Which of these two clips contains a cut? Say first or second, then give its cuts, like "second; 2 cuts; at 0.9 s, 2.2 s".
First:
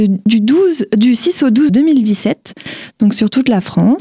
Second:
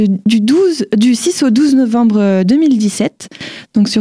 first; 1 cut; at 1.7 s